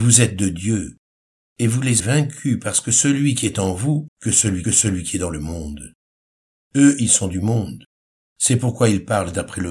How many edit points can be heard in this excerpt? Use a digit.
3